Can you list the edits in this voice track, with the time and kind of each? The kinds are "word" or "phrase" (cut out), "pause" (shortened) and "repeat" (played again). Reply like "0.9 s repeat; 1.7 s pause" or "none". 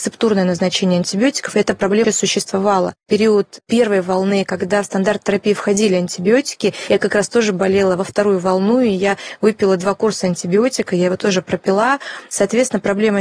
2.0 s word

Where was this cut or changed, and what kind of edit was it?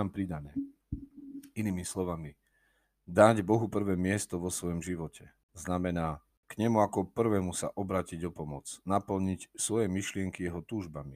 none

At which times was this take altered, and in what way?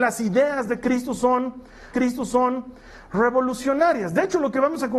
1.9 s repeat

